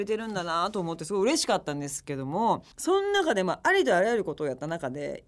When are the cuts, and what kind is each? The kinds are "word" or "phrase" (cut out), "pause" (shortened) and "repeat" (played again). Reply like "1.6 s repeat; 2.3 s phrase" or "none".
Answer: 2.7 s pause